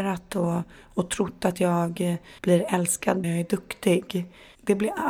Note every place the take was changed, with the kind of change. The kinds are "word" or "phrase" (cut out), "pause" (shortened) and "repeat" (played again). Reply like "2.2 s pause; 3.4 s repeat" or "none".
2.4 s pause; 3.2 s word

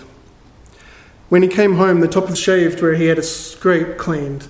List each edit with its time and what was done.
2.3 s phrase

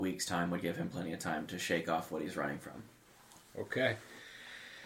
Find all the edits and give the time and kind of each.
none

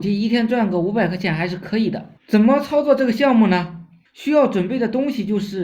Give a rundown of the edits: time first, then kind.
2.2 s pause; 4.1 s pause

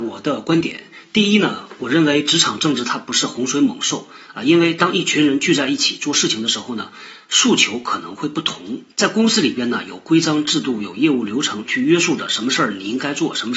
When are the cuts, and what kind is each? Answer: 8.9 s pause

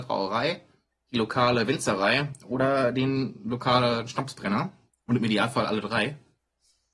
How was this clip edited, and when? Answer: 4.9 s pause

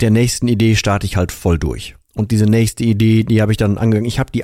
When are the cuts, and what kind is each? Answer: 2.0 s pause

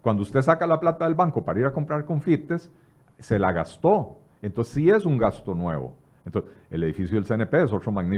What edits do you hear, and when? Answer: none

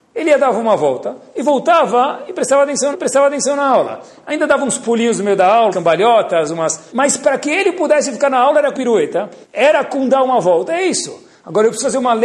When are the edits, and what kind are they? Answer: 2.9 s repeat; 5.7 s word; 6.9 s word; 8.7 s word; 9.4 s pause

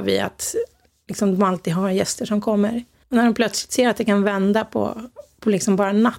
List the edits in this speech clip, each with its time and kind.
3.0 s pause

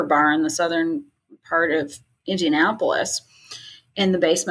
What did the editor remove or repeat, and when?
none

